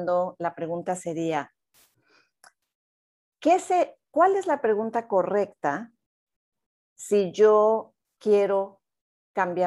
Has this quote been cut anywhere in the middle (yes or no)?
no